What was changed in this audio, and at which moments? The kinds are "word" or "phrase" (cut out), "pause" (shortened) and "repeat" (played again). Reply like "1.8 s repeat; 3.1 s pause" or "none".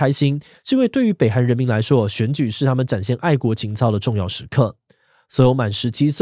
none